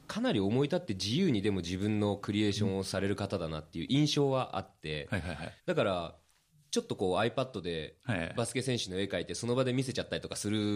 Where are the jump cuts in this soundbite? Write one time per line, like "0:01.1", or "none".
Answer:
0:05.6